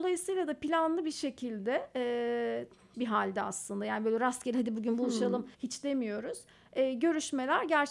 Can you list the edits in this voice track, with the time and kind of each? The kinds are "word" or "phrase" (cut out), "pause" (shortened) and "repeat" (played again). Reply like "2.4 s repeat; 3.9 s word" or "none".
2.9 s word; 5.5 s pause

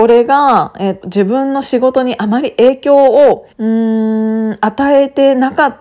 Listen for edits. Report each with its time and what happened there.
1.0 s word; 3.5 s pause

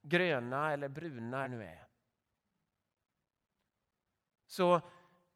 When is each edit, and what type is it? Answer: 1.4 s phrase

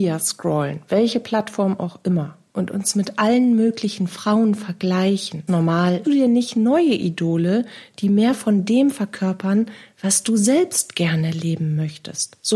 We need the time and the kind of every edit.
5.5 s word; 6.0 s phrase

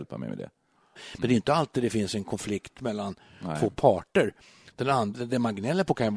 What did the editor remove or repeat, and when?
none

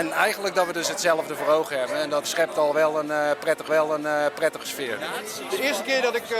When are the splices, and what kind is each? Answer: 2.2 s word; 3.7 s repeat

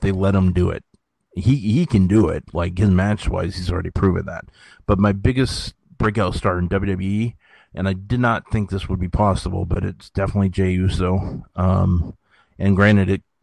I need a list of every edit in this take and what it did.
none

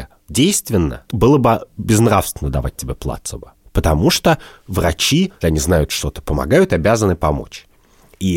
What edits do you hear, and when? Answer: 1.1 s word; 5.4 s word

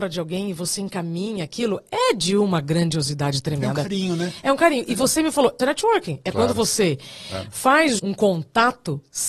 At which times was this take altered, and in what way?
5.6 s word; 8.0 s word

